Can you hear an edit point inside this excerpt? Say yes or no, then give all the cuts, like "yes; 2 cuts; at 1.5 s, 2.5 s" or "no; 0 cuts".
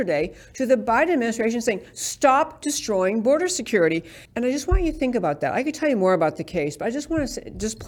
yes; 1 cut; at 4.3 s